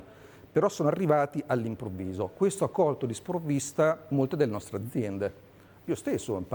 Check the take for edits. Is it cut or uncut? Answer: uncut